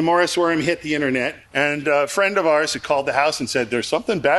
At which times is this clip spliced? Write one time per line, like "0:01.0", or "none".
0:01.4